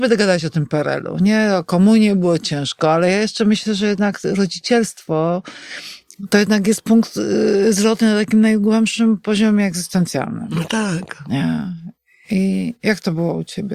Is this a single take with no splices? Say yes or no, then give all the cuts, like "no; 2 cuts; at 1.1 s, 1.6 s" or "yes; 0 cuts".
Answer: yes; 0 cuts